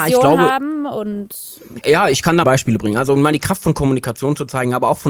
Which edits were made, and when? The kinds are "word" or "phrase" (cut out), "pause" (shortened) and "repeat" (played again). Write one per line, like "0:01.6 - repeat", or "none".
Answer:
0:01.8 - phrase
0:02.4 - phrase